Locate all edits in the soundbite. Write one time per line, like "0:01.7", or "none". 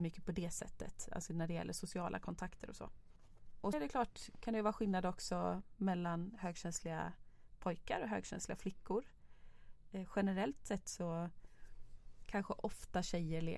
0:03.7